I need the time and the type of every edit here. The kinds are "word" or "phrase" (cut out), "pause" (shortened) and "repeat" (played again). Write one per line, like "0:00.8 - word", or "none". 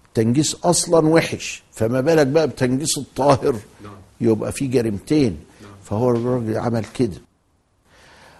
none